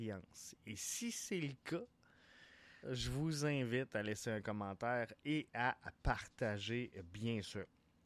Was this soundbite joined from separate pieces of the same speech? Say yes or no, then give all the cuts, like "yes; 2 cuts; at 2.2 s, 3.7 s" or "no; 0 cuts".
yes; 1 cut; at 2.8 s